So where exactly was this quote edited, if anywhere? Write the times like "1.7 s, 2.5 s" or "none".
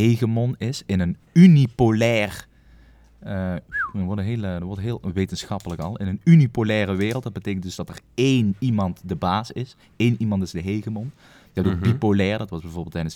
none